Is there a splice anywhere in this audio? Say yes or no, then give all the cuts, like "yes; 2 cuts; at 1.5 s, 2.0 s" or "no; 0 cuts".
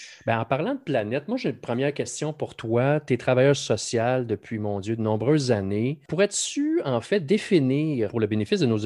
no; 0 cuts